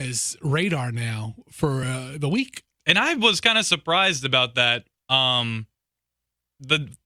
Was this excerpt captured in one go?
yes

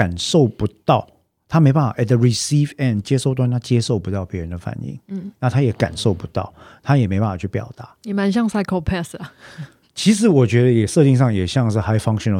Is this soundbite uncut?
yes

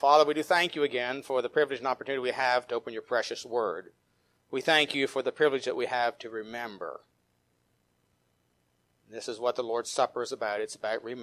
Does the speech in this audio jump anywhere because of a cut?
no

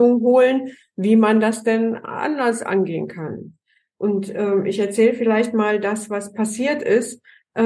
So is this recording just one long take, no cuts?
yes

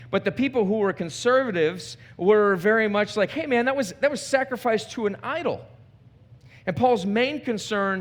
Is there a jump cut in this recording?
no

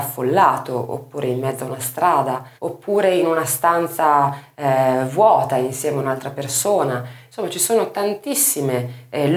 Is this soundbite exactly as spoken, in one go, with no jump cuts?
no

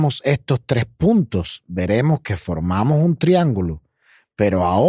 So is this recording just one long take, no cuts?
yes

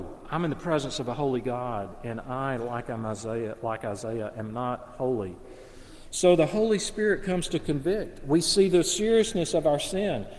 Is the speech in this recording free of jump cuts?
yes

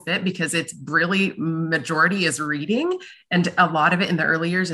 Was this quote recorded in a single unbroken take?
yes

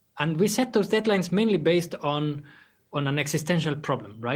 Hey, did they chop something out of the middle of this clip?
no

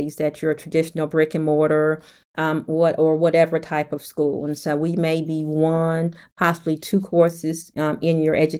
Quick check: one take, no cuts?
yes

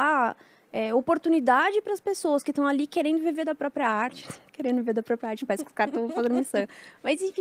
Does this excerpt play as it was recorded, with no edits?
yes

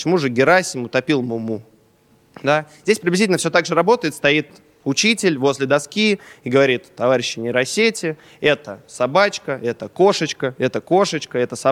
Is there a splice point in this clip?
no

